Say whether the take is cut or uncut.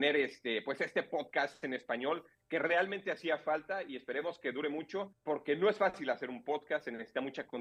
cut